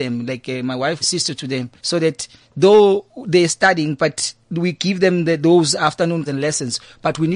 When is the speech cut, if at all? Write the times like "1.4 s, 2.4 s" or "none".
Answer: 1.0 s, 1.8 s, 4.4 s, 6.3 s